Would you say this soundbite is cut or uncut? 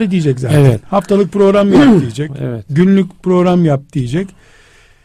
uncut